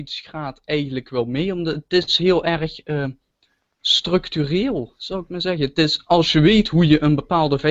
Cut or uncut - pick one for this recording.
uncut